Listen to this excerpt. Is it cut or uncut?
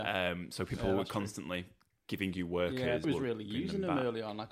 cut